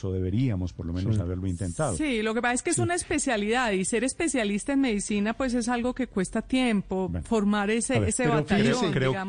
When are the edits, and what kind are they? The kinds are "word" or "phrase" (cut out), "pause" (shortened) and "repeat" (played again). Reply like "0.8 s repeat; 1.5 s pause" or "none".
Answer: none